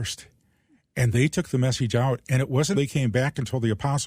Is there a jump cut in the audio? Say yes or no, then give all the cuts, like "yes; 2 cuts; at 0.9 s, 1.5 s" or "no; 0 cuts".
yes; 1 cut; at 2.7 s